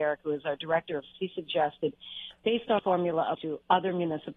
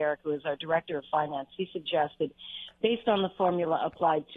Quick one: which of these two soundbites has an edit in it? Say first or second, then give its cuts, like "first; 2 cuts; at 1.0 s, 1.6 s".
first; 3 cuts; at 1.1 s, 2.8 s, 3.3 s